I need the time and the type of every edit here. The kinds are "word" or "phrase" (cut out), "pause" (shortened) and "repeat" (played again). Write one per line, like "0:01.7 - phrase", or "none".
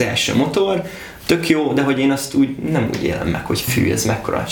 none